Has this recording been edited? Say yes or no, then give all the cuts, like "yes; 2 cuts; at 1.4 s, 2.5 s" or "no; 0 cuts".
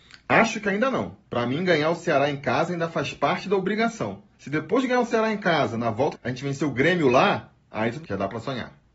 yes; 4 cuts; at 1.3 s, 4.3 s, 6.1 s, 8.0 s